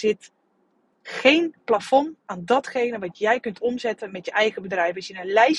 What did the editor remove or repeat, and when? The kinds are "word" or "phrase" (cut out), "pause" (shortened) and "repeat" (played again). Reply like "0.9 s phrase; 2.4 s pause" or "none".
2.2 s pause